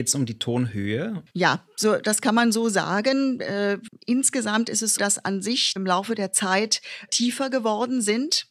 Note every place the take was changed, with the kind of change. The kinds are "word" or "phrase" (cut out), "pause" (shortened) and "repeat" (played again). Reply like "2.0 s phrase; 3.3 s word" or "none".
1.3 s pause; 5.0 s word; 5.8 s phrase